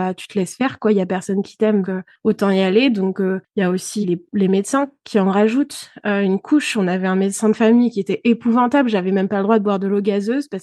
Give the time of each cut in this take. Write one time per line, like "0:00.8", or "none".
0:01.8
0:04.0